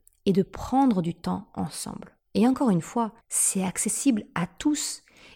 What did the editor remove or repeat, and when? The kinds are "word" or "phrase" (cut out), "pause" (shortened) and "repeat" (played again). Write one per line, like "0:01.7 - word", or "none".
0:03.2 - pause

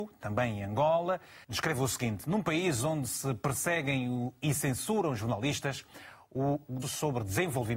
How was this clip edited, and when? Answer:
0:01.4 - pause
0:06.8 - word

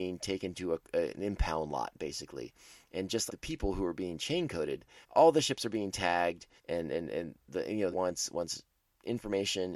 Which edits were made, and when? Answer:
0:03.3 - word
0:05.0 - pause
0:06.6 - pause
0:07.9 - phrase

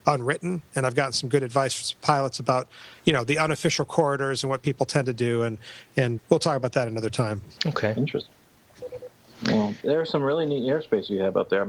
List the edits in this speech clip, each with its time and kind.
0:06.2 - word
0:07.6 - pause
0:09.8 - word

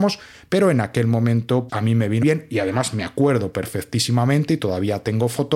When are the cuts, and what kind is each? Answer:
0:01.7 - word
0:02.2 - word

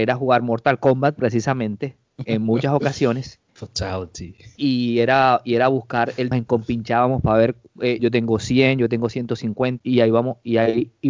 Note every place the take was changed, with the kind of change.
0:02.2 - word
0:03.5 - pause
0:06.3 - phrase
0:08.0 - word
0:09.8 - word

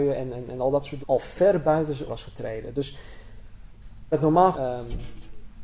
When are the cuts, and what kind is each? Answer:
0:01.0 - word
0:02.1 - word
0:04.1 - word
0:04.5 - phrase

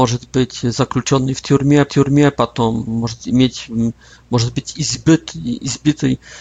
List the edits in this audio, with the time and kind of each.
0:01.9 - repeat

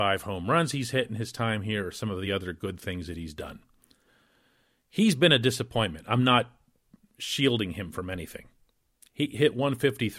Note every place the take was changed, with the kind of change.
none

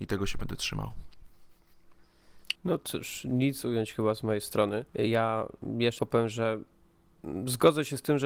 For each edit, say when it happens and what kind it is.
0:02.5 - pause
0:03.6 - phrase
0:04.9 - pause
0:06.0 - word

